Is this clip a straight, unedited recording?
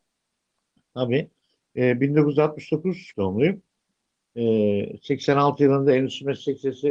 no; 1 cut; at 3.1 s

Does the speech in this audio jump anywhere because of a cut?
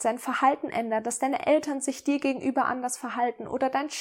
no; 0 cuts

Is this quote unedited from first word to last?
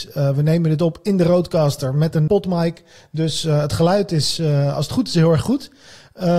no; 1 cut; at 2.3 s

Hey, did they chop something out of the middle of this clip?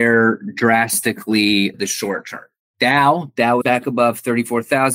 yes; 2 cuts; at 1.7 s, 3.6 s

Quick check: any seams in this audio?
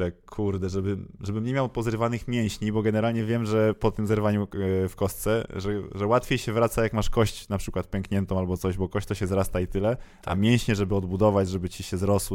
no; 0 cuts

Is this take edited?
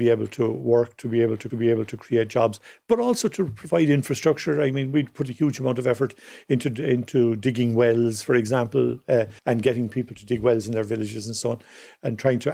yes; 2 cuts; at 1.5 s, 9.4 s

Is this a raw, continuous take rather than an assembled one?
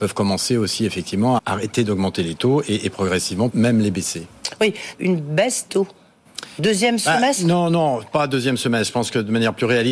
no; 4 cuts; at 1.4 s, 3.5 s, 5.0 s, 5.7 s

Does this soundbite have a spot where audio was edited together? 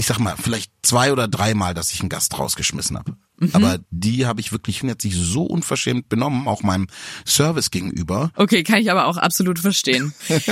yes; 2 cuts; at 3.9 s, 4.8 s

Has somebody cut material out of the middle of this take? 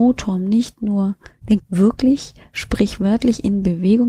yes; 1 cut; at 1.6 s

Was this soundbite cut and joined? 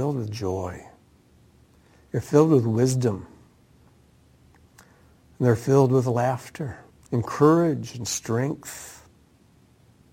yes; 1 cut; at 6.9 s

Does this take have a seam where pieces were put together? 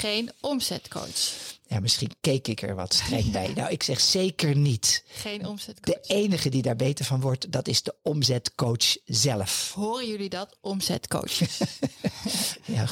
no; 0 cuts

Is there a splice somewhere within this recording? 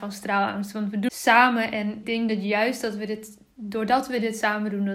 yes; 2 cuts; at 1.1 s, 2.0 s

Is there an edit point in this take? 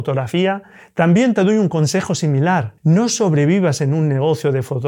yes; 1 cut; at 2.8 s

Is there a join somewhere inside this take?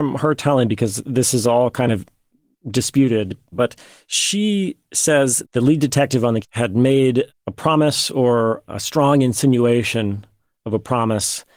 yes; 4 cuts; at 3.5 s, 5.4 s, 6.4 s, 8.7 s

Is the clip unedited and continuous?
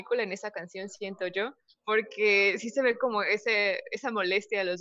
yes; 0 cuts

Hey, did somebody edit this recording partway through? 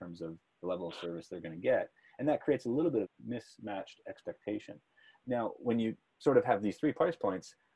yes; 1 cut; at 3.0 s

